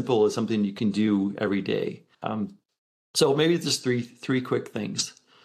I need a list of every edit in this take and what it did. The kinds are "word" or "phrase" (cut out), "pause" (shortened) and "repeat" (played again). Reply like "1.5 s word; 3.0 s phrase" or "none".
2.1 s pause